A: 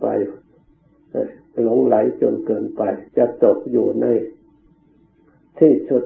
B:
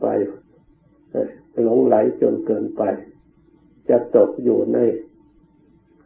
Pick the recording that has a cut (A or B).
A